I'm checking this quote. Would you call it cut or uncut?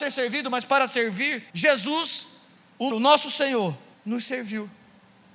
cut